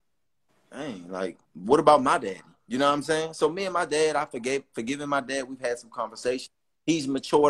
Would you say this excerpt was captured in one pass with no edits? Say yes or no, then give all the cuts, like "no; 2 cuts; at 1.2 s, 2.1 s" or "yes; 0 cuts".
no; 1 cut; at 1.4 s